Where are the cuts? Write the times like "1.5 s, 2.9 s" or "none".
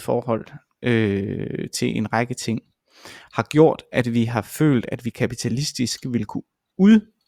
none